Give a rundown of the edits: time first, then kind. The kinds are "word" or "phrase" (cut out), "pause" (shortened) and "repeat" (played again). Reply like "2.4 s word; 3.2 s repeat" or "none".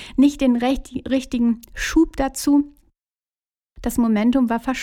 none